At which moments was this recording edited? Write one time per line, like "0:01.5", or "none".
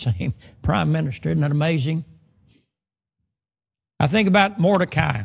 none